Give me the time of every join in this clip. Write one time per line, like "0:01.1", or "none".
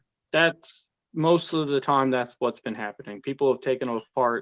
none